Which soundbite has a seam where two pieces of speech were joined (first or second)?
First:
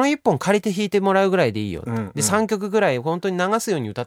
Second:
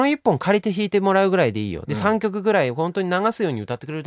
second